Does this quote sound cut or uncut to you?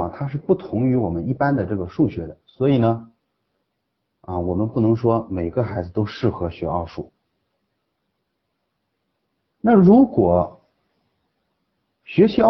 uncut